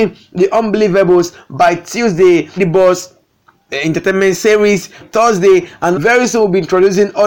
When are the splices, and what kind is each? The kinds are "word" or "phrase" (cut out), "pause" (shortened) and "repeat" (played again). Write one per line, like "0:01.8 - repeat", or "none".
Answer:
0:02.6 - word
0:03.7 - word
0:05.0 - word
0:05.9 - word